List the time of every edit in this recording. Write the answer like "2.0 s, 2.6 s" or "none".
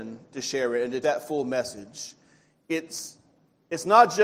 1.0 s